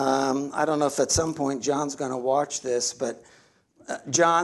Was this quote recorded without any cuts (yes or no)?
yes